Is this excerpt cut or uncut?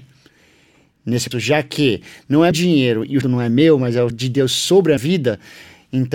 cut